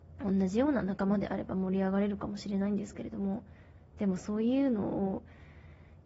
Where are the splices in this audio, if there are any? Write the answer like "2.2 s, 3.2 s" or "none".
none